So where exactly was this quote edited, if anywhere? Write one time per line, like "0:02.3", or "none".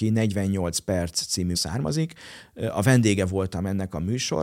0:01.5